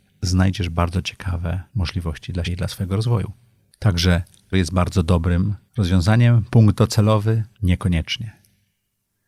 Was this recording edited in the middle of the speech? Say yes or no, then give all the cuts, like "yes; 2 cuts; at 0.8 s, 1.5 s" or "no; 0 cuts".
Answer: yes; 5 cuts; at 1.7 s, 2.4 s, 4.5 s, 5.7 s, 7.5 s